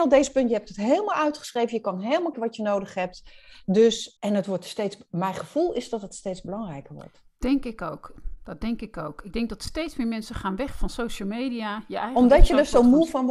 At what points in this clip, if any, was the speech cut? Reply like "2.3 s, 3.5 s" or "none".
2.3 s, 4.2 s, 10.7 s